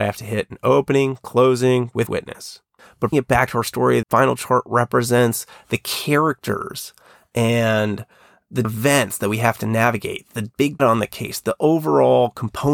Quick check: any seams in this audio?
yes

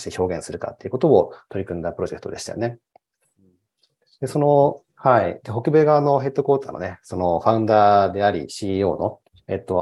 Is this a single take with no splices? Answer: yes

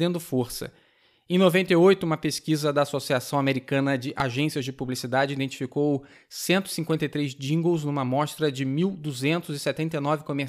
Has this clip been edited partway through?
no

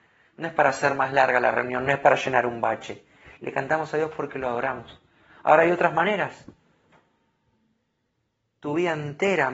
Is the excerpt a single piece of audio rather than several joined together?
yes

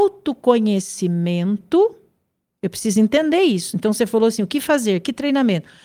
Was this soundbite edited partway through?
no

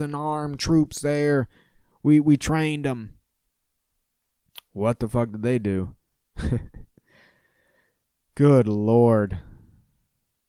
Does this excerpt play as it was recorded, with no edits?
yes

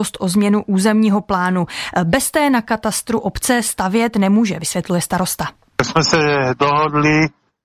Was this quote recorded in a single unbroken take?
yes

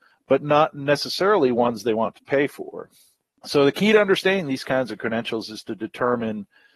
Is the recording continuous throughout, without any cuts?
yes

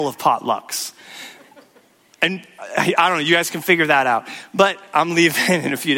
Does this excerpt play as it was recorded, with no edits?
yes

